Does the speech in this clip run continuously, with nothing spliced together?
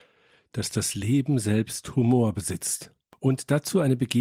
yes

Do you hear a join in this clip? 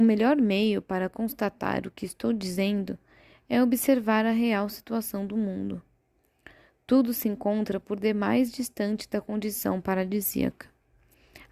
no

